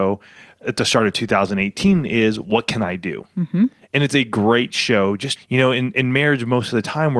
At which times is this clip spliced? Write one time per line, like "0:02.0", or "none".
0:05.4